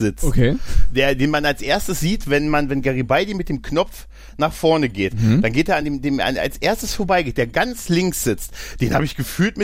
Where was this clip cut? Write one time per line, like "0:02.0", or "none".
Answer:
none